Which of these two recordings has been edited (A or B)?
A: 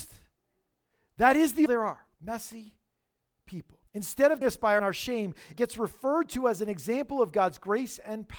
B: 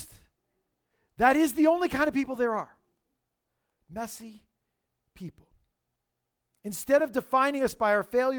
A